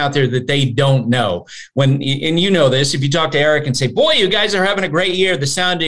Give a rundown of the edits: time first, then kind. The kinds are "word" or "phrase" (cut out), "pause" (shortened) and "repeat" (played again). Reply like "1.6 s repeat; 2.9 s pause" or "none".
none